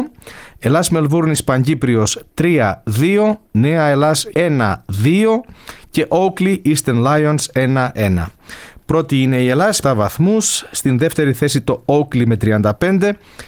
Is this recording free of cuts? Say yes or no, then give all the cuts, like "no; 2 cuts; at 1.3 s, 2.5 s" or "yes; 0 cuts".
no; 2 cuts; at 4.3 s, 9.8 s